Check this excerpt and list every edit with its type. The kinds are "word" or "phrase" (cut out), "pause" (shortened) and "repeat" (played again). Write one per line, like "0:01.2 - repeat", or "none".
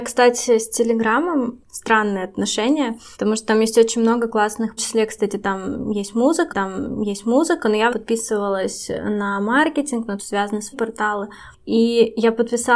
0:01.6 - word
0:03.1 - pause
0:04.8 - phrase
0:06.5 - repeat
0:07.9 - phrase
0:10.2 - phrase
0:10.7 - phrase